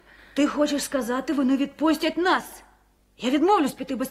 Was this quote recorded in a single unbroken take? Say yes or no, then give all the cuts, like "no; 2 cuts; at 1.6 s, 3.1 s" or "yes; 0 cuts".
yes; 0 cuts